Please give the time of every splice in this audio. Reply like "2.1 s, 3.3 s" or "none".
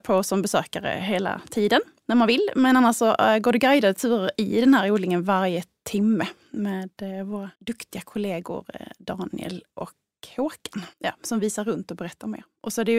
7.6 s, 10.9 s